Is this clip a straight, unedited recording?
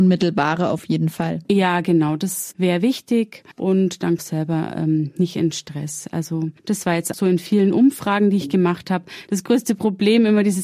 no; 4 cuts; at 1.4 s, 3.5 s, 4.2 s, 7.1 s

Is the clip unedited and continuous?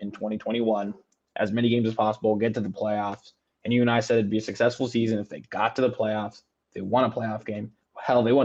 yes; 0 cuts

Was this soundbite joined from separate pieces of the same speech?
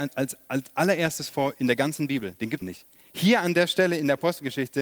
yes; 1 cut; at 2.6 s

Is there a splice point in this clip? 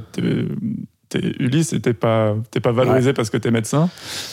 no; 0 cuts

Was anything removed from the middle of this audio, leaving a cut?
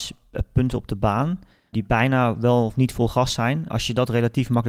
yes; 2 cuts; at 1.7 s, 3.7 s

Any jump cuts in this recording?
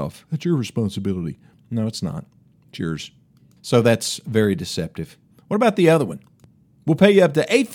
no; 0 cuts

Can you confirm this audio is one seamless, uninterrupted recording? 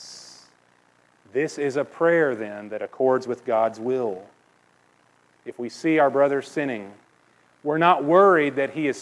yes; 0 cuts

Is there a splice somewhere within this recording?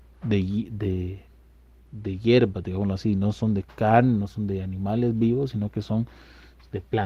no; 0 cuts

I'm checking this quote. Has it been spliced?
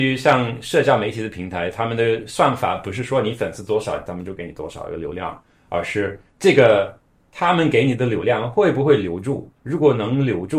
yes; 2 cuts; at 6.3 s, 9.6 s

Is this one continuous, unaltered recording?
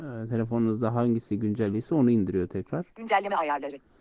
no; 1 cut; at 2.9 s

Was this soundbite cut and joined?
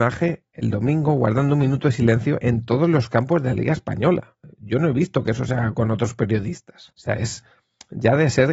yes; 1 cut; at 6.9 s

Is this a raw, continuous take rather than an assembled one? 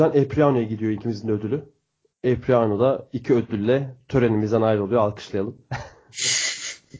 yes; 0 cuts

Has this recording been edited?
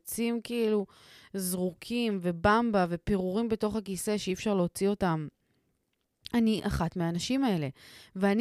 no; 0 cuts

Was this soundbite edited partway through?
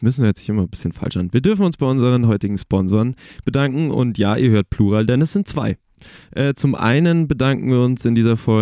no; 0 cuts

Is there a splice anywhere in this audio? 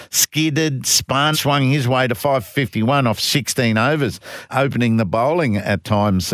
yes; 2 cuts; at 1.3 s, 4.5 s

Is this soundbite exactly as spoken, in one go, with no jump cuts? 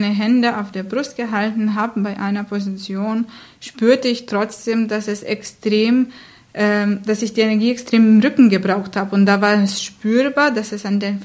yes; 0 cuts

